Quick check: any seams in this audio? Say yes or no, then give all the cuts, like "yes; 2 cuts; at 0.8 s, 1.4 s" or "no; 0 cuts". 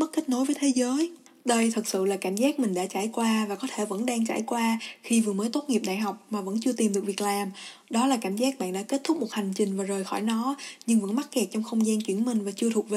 no; 0 cuts